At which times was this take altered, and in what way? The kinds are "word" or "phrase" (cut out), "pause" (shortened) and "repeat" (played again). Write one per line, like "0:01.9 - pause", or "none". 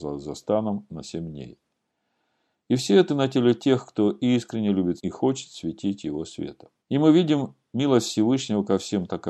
0:03.1 - word
0:05.0 - word
0:06.8 - pause

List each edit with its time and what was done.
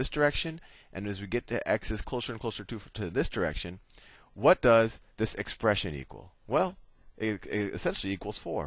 0:05.1 - pause

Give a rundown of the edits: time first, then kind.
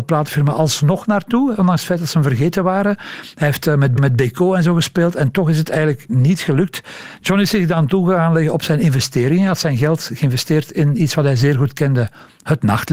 0:04.0 - repeat
0:06.1 - word

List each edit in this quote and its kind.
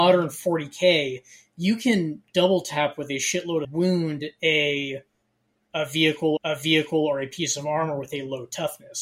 0:03.6 - phrase
0:06.4 - repeat

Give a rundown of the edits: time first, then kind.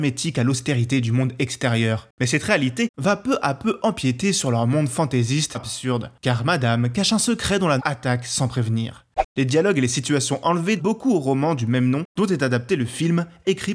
0:05.5 - word
0:07.8 - word
0:10.8 - word

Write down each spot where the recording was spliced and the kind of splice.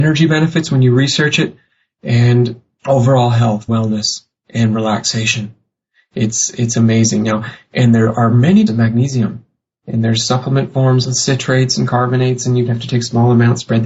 0:03.7 - word
0:08.7 - phrase

